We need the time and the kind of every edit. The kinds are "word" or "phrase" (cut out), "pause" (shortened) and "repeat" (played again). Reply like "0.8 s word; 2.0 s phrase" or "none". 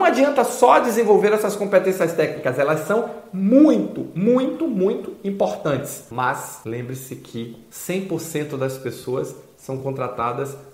none